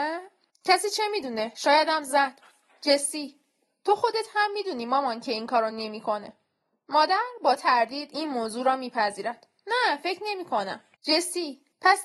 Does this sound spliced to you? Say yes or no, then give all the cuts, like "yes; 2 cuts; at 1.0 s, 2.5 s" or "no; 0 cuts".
no; 0 cuts